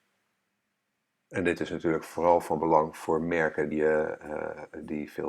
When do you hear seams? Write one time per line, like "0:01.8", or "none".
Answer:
0:03.7